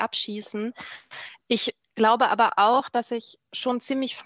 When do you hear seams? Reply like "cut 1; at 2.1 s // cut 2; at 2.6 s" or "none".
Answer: cut 1; at 1.8 s